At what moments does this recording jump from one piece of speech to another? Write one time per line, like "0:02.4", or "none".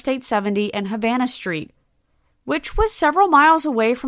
none